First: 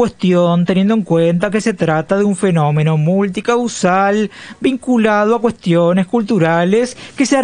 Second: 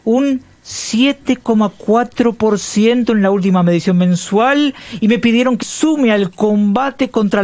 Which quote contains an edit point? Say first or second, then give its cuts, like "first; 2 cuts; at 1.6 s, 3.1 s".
second; 1 cut; at 5.6 s